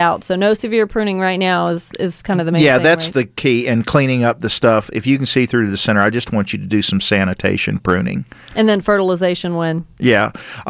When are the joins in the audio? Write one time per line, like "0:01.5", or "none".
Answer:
none